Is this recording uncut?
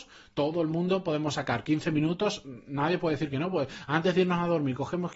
yes; 0 cuts

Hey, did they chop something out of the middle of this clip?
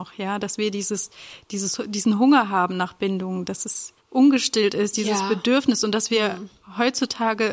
yes; 1 cut; at 4.0 s

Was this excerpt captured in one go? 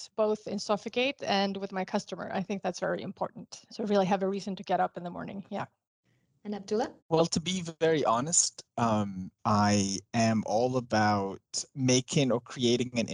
no; 2 cuts; at 7.0 s, 9.4 s

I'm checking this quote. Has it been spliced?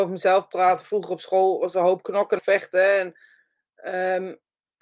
yes; 1 cut; at 2.4 s

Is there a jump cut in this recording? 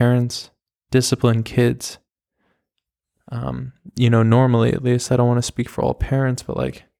no; 0 cuts

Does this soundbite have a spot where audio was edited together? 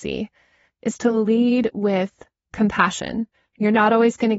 yes; 1 cut; at 3.3 s

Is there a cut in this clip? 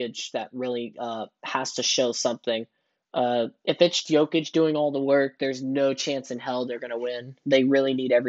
yes; 1 cut; at 4.0 s

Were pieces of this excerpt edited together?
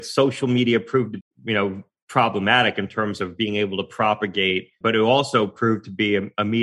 yes; 2 cuts; at 1.2 s, 4.8 s

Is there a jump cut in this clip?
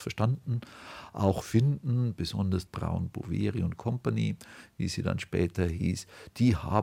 yes; 2 cuts; at 1.4 s, 2.7 s

